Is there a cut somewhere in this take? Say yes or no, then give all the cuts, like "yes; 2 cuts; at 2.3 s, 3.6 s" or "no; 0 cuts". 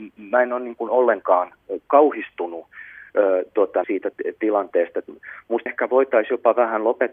yes; 2 cuts; at 3.8 s, 5.7 s